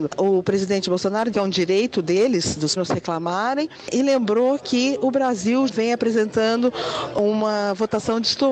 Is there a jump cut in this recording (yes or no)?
yes